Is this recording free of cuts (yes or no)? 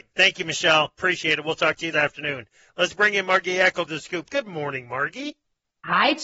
no